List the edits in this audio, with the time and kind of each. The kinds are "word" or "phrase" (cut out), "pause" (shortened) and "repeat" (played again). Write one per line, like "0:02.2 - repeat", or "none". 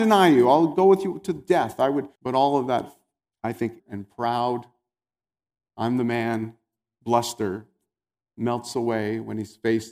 0:02.2 - pause
0:03.2 - pause
0:03.8 - word